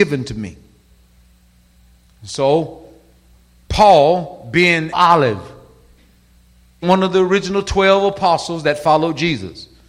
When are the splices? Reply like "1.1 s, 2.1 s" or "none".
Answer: 4.9 s, 6.8 s